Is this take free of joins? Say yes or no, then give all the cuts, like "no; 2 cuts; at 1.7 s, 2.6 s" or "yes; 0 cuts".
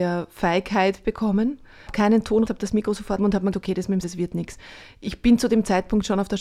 no; 5 cuts; at 1.9 s, 2.5 s, 3.2 s, 3.5 s, 4.0 s